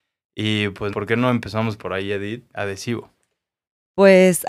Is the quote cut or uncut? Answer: cut